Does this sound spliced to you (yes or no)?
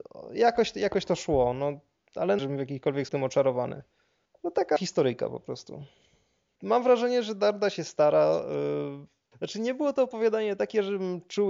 yes